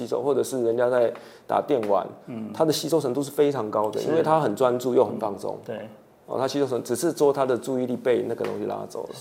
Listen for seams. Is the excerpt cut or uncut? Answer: uncut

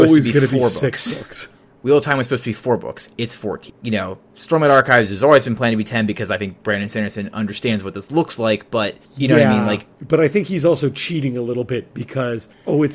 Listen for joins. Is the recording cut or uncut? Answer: uncut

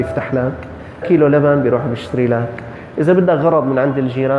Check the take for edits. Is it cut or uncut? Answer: cut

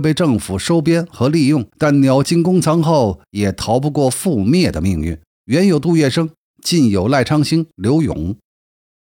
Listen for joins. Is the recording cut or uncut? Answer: cut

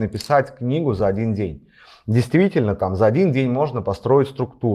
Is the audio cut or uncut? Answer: uncut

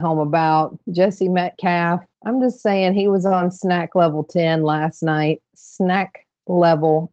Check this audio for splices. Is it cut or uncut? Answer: cut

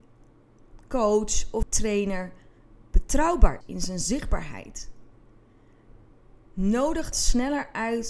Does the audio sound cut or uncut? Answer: cut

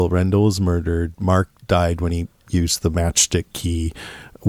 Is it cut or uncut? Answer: cut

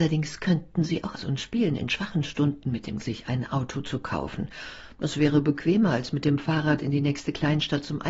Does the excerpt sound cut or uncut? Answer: cut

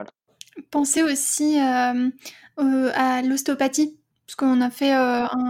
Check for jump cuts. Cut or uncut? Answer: uncut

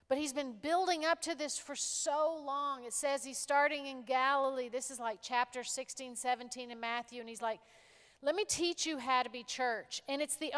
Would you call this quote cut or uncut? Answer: uncut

